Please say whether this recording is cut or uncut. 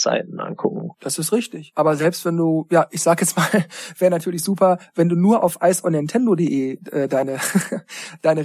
uncut